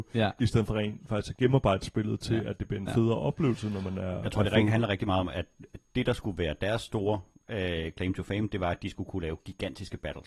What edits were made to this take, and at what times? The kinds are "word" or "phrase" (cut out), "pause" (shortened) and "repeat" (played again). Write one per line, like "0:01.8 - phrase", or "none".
none